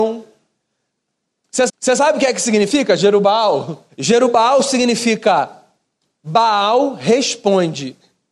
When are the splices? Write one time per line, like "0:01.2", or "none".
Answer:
0:01.7
0:03.9